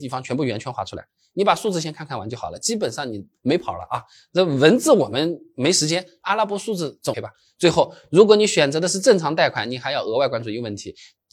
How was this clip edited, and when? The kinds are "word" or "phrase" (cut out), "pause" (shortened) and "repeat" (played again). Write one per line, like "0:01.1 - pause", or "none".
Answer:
0:07.1 - word